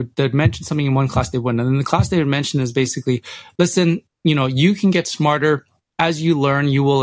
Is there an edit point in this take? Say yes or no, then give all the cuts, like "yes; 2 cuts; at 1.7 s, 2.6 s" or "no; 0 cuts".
no; 0 cuts